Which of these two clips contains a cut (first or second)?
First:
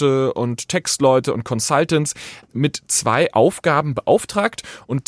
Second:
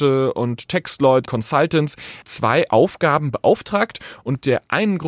second